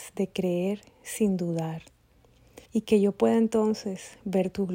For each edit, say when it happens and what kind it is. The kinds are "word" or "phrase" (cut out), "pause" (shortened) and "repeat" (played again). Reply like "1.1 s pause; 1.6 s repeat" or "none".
2.7 s pause